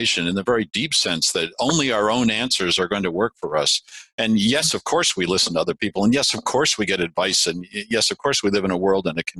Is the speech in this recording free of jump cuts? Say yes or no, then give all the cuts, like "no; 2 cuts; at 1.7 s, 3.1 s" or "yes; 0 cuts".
yes; 0 cuts